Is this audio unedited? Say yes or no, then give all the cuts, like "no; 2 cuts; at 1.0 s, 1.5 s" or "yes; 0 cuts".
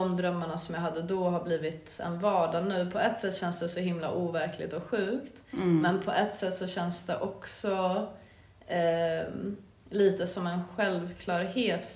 yes; 0 cuts